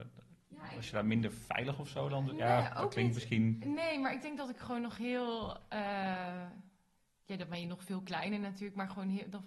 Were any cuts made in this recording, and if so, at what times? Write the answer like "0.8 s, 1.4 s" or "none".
none